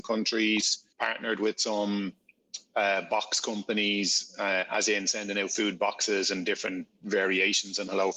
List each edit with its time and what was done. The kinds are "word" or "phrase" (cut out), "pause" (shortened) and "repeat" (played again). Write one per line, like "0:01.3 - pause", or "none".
0:00.9 - pause